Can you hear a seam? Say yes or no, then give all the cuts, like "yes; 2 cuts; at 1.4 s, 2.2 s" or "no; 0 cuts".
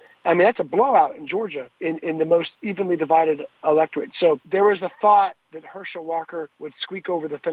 yes; 3 cuts; at 1.7 s, 4.4 s, 6.5 s